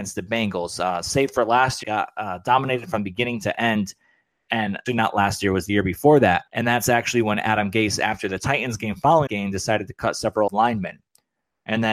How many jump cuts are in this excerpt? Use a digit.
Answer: 5